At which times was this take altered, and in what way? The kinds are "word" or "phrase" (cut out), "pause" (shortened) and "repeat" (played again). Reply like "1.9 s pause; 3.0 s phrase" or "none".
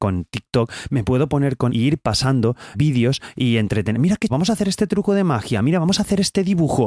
1.7 s word; 2.7 s word; 4.3 s word